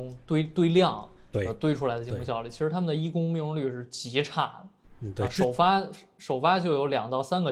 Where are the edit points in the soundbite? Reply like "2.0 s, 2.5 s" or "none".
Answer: 4.8 s